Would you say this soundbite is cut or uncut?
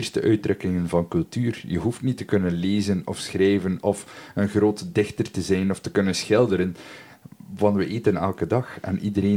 uncut